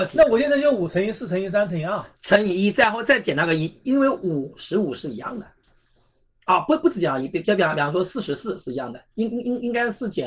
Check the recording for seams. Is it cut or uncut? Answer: cut